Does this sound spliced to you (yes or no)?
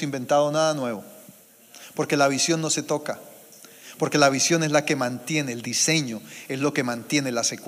no